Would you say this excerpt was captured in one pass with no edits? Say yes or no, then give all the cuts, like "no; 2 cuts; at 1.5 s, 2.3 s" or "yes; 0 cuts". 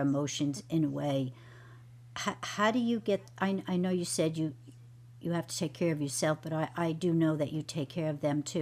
yes; 0 cuts